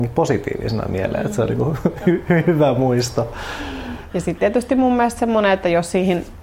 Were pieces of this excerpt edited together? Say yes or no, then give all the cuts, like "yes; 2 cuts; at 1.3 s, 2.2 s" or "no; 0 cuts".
no; 0 cuts